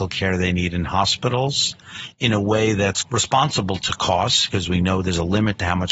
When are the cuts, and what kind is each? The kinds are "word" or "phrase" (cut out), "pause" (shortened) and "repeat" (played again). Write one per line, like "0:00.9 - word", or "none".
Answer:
none